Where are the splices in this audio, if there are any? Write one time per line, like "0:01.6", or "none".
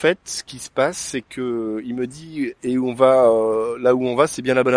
none

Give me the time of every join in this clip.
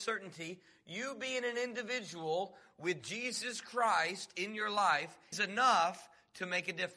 0:05.3

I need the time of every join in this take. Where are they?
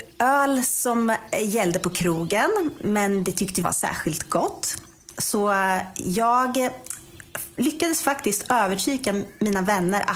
0:03.6

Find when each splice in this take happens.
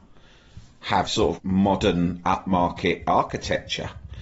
0:01.1
0:01.4

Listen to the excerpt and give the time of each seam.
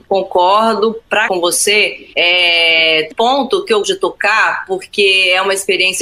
0:01.3
0:03.1
0:03.8

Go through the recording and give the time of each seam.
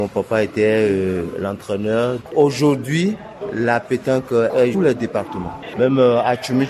0:04.7

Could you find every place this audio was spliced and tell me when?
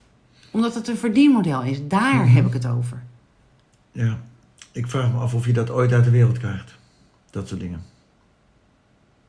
none

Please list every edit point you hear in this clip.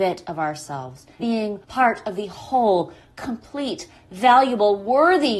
0:01.2
0:01.6

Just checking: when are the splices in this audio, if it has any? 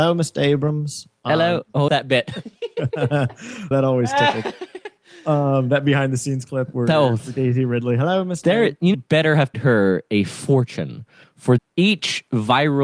0:01.9
0:03.7
0:08.9
0:09.5
0:11.6

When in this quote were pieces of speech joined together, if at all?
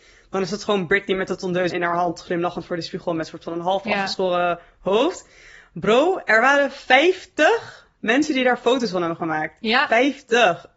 0:01.7

